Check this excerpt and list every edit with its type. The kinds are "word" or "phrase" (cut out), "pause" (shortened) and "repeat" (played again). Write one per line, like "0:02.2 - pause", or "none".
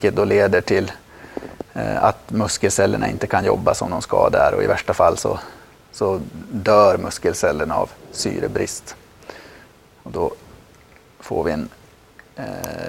none